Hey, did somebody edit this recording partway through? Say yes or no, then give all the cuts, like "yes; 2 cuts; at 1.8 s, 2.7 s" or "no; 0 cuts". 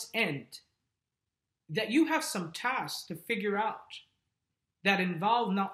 no; 0 cuts